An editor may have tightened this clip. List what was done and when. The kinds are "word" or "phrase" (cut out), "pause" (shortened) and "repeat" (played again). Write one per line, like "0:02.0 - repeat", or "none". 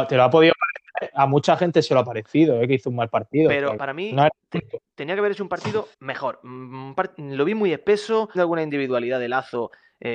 0:03.8 - word
0:05.9 - pause
0:08.3 - phrase